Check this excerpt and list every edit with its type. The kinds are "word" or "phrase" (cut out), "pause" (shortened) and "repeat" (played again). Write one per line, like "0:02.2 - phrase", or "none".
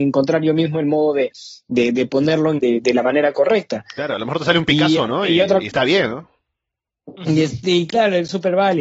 0:02.6 - phrase